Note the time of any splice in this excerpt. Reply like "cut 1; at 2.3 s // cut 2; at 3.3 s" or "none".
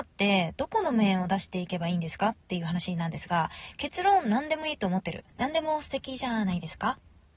cut 1; at 5.3 s